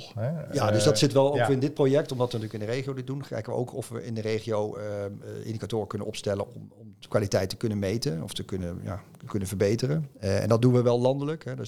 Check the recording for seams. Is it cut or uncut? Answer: uncut